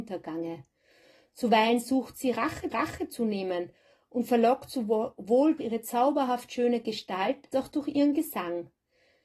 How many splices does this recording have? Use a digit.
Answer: 3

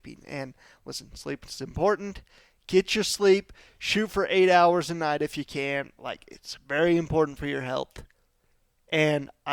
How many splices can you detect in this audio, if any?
0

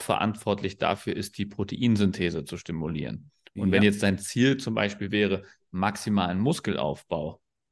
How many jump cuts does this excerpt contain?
0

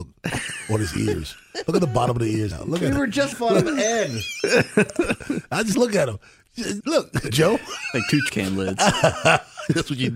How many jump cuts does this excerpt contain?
5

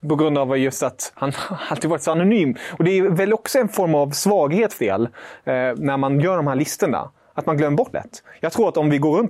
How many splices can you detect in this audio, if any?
2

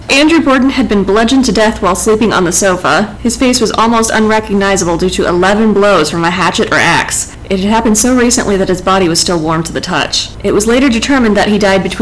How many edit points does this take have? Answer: 0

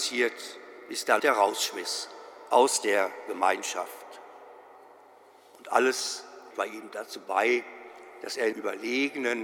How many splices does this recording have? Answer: 3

